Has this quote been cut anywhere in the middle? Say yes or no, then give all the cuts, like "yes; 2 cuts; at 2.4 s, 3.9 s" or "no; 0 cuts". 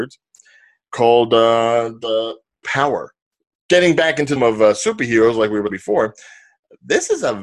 yes; 4 cuts; at 2.6 s, 3.5 s, 4.4 s, 5.7 s